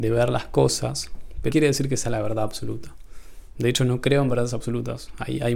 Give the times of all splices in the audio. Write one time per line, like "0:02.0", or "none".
0:01.5